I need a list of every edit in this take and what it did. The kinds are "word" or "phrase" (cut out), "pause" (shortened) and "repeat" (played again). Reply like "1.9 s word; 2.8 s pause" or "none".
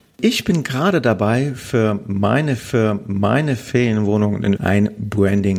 2.6 s repeat; 4.6 s word